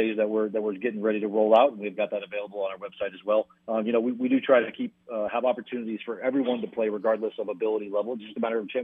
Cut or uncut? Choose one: cut